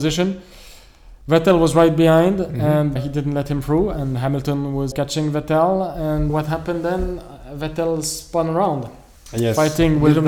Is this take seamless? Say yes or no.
no